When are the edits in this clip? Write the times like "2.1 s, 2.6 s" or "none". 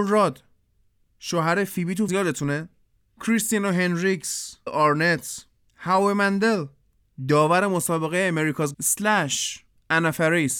2.1 s, 4.7 s, 8.7 s